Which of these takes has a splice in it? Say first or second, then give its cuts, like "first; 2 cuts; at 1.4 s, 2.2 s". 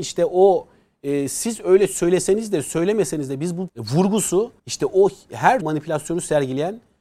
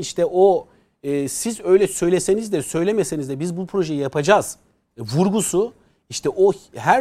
first; 3 cuts; at 3.7 s, 4.6 s, 5.6 s